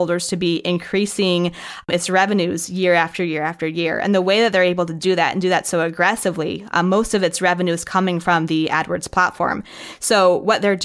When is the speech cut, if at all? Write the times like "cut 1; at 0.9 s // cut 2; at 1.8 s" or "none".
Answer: none